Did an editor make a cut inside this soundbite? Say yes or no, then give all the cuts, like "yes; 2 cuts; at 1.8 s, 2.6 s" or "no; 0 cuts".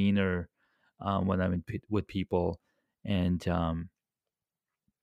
no; 0 cuts